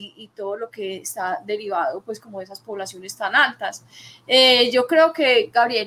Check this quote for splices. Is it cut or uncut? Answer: uncut